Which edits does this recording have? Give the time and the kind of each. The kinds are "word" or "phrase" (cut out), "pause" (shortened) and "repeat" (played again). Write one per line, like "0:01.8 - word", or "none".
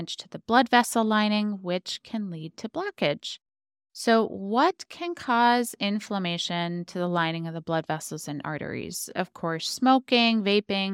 none